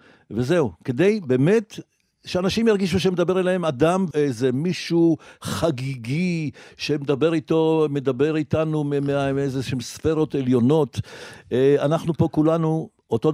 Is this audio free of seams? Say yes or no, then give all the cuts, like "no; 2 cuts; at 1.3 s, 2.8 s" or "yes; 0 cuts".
no; 1 cut; at 4.1 s